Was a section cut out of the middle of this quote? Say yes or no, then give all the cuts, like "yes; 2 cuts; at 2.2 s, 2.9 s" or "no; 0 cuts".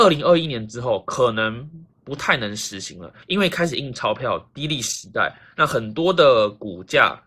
yes; 1 cut; at 3.2 s